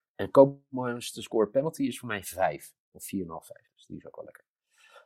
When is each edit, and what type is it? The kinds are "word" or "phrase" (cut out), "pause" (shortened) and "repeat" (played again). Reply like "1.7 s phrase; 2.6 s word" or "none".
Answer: none